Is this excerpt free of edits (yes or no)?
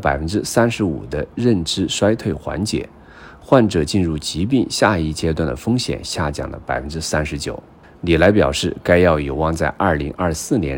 no